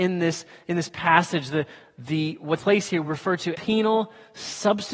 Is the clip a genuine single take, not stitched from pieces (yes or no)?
no